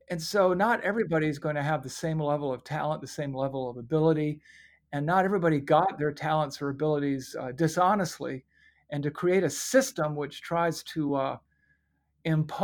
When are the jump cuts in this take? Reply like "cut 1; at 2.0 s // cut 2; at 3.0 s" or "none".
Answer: none